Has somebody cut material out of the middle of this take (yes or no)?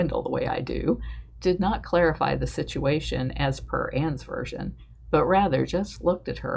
no